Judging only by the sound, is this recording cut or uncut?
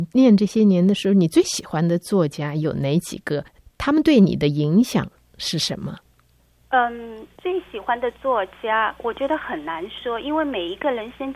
cut